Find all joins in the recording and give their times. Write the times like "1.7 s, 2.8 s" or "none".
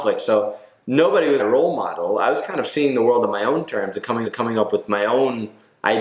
1.4 s, 4.2 s